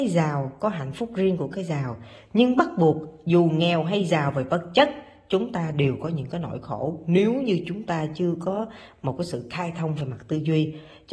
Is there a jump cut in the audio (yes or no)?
no